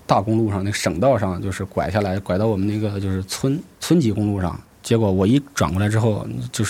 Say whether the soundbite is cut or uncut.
cut